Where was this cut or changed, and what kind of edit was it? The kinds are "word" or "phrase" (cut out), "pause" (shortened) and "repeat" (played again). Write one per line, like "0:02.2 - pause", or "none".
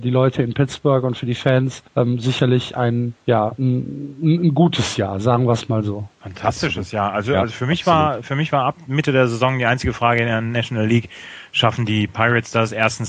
0:01.9 - pause
0:03.2 - pause
0:06.1 - pause